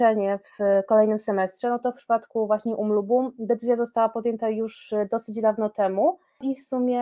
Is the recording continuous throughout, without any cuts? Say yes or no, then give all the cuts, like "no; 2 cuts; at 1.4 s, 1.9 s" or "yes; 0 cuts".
yes; 0 cuts